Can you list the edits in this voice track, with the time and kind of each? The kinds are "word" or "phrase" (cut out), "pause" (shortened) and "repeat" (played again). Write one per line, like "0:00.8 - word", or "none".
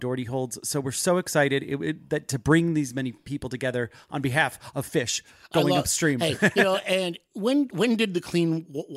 none